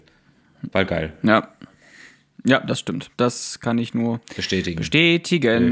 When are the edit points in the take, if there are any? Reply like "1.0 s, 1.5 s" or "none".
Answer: none